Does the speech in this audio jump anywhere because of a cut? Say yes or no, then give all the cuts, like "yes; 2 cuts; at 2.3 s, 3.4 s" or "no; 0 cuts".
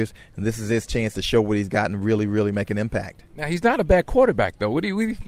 no; 0 cuts